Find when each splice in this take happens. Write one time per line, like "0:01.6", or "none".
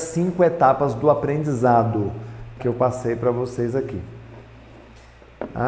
0:02.6